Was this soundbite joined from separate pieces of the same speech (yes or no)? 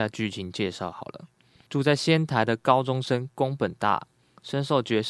no